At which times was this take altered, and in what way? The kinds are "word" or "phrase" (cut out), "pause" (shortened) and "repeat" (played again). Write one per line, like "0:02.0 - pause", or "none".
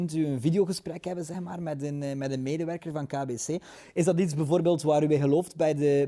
none